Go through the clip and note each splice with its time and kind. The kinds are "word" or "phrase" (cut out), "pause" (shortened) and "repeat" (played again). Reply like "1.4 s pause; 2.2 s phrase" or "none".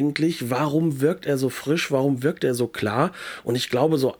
none